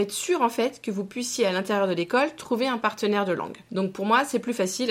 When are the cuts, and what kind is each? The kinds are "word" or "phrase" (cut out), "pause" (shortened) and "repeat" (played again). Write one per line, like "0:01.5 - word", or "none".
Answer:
0:03.6 - pause